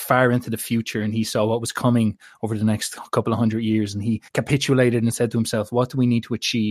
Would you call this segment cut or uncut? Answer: cut